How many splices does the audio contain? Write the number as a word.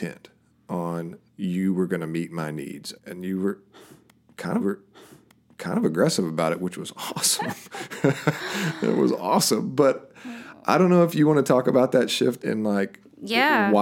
four